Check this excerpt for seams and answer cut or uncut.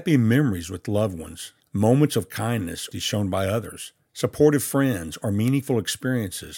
cut